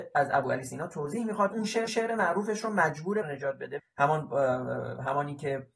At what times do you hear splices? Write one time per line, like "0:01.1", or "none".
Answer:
0:01.5
0:01.9
0:03.2
0:03.8